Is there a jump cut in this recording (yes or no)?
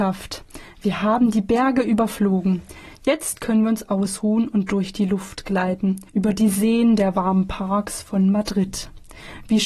yes